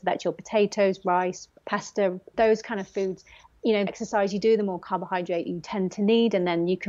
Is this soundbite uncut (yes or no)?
no